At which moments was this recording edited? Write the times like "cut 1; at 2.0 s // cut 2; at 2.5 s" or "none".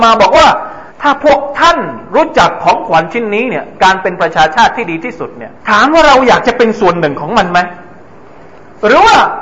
cut 1; at 0.9 s // cut 2; at 5.6 s